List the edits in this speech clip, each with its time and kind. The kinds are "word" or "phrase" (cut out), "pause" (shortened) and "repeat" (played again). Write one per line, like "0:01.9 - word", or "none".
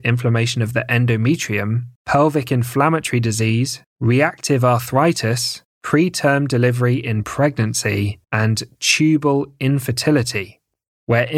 0:02.0 - pause
0:03.8 - pause
0:05.6 - pause
0:08.2 - pause